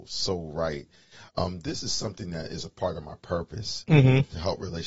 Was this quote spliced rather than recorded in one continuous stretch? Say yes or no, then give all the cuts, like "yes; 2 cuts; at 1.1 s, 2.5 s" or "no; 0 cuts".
no; 0 cuts